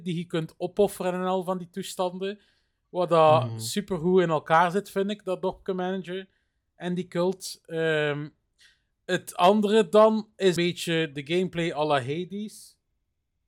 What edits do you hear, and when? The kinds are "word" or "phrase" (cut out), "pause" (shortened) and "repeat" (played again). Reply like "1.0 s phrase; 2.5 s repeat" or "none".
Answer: 10.6 s word